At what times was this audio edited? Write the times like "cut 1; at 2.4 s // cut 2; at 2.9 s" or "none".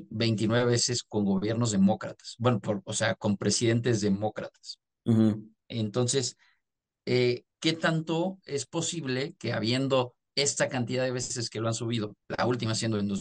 cut 1; at 5.6 s // cut 2; at 7.5 s // cut 3; at 12.2 s